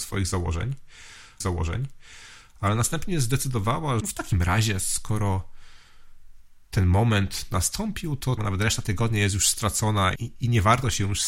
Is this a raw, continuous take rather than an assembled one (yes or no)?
no